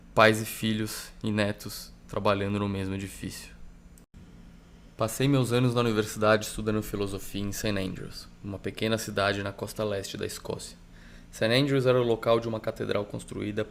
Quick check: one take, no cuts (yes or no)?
yes